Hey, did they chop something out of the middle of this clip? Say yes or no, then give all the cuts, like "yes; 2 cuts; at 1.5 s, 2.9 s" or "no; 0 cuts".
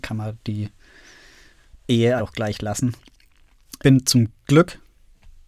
yes; 2 cuts; at 2.2 s, 3.8 s